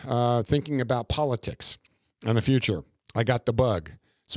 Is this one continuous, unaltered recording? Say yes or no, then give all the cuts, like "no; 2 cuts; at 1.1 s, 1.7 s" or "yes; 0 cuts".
yes; 0 cuts